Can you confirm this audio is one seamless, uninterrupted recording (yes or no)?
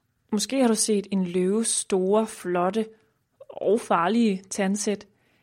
yes